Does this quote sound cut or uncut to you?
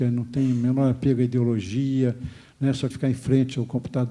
cut